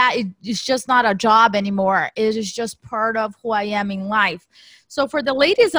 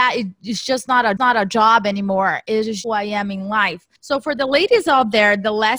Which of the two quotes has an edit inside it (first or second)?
second